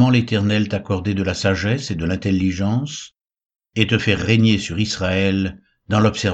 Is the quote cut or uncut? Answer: uncut